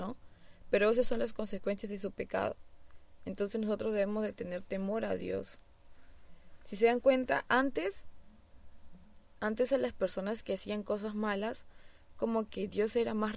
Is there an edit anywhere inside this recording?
no; 0 cuts

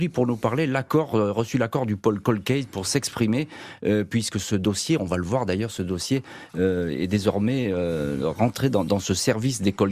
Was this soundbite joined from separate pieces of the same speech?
no; 0 cuts

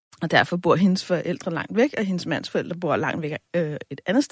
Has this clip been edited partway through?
no; 0 cuts

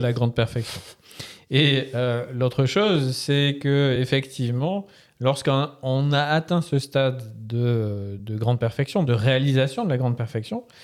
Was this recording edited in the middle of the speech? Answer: no; 0 cuts

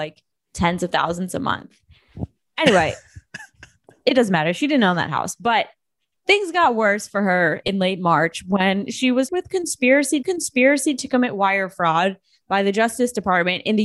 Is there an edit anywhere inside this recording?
yes; 2 cuts; at 9.3 s, 10.2 s

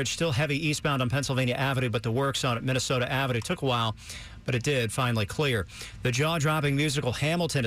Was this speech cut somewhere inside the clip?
no; 0 cuts

